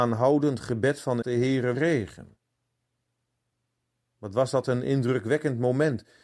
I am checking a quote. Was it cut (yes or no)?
yes